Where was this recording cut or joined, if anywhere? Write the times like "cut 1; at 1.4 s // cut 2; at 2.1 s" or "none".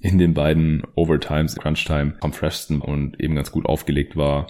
cut 1; at 1.6 s // cut 2; at 2.2 s // cut 3; at 2.8 s